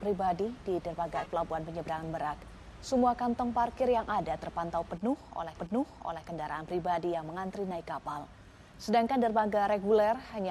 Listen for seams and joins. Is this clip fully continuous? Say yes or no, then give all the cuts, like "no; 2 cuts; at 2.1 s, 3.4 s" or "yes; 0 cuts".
no; 2 cuts; at 1.3 s, 5.6 s